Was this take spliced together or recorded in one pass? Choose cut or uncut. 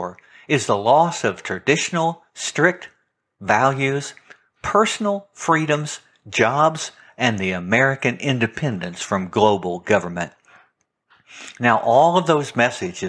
uncut